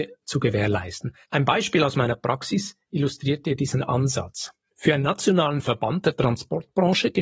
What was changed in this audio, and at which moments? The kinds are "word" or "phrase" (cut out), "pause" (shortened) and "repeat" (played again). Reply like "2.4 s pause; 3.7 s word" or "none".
1.2 s pause; 4.6 s pause